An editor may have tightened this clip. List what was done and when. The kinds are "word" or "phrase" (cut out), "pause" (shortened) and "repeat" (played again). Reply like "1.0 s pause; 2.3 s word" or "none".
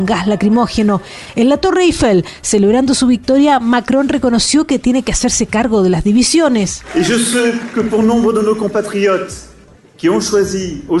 none